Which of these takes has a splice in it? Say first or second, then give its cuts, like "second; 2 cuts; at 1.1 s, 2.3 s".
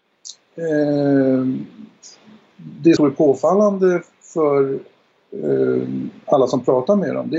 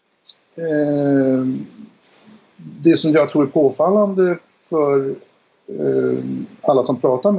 first; 1 cut; at 3.0 s